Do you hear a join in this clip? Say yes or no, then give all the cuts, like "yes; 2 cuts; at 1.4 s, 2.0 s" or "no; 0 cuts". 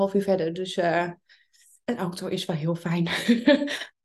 no; 0 cuts